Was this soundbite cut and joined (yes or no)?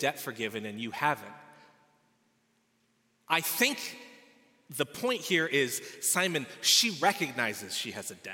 no